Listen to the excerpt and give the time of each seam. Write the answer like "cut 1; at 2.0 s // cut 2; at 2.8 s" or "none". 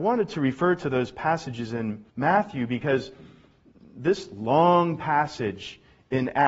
cut 1; at 2.1 s